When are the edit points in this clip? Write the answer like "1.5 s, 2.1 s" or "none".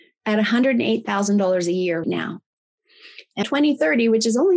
2.0 s, 3.4 s